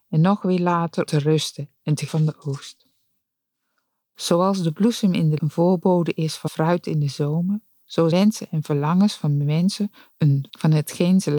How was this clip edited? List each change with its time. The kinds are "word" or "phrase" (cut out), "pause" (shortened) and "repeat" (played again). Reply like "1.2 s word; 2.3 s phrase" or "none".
1.1 s word; 2.1 s word; 5.4 s word; 6.5 s word; 8.1 s word; 10.5 s word